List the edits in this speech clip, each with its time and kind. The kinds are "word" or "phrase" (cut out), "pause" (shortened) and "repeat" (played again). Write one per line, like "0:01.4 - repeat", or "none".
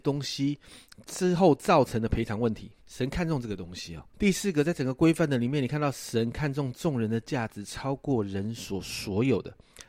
0:02.8 - pause
0:04.1 - pause